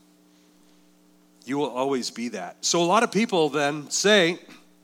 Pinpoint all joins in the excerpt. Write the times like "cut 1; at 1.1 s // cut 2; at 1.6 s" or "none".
none

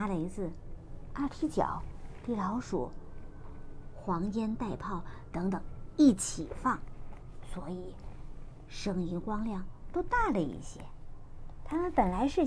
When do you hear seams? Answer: none

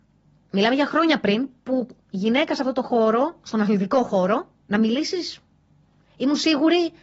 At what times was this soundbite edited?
cut 1; at 2.0 s // cut 2; at 4.6 s

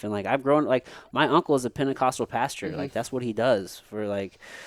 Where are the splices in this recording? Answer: none

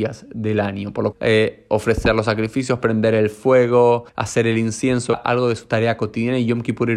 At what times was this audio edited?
cut 1; at 1.1 s // cut 2; at 4.1 s // cut 3; at 5.1 s

